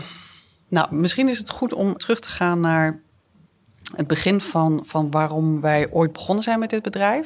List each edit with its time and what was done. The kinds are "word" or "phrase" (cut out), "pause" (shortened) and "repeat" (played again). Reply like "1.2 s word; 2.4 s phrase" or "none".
2.0 s word